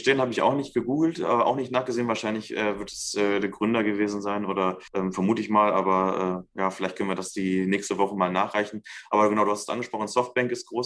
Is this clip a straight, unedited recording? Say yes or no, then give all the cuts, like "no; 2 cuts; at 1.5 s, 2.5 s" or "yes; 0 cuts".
no; 1 cut; at 4.9 s